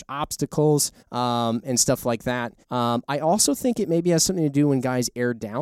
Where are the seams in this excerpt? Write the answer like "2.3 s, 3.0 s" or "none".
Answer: 1.0 s, 2.6 s